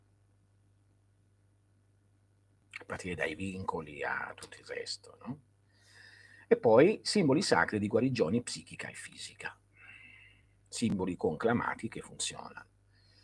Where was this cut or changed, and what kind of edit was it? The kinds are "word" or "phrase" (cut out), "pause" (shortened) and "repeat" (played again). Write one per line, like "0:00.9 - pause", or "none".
none

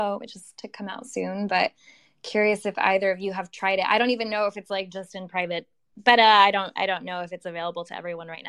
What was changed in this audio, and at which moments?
none

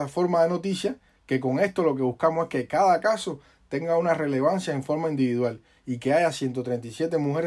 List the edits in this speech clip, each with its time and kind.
none

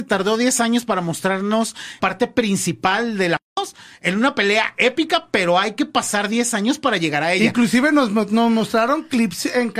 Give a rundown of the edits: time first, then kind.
0:02.0 - phrase

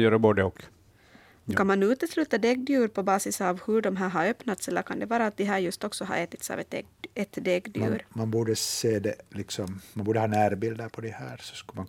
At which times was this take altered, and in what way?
0:09.9 - pause

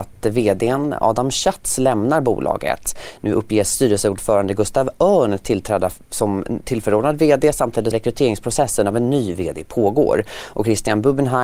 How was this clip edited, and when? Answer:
0:07.9 - word

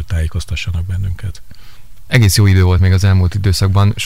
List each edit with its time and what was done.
none

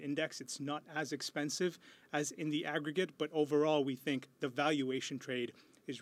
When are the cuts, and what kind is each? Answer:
none

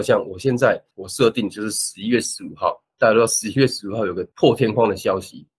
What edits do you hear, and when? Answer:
0:00.9 - pause
0:04.3 - pause

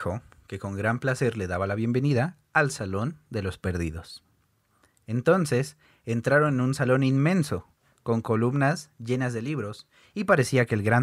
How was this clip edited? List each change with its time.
none

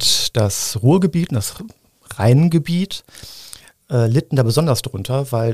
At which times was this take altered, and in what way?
none

